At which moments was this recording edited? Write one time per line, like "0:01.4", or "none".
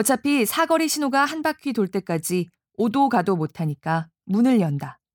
none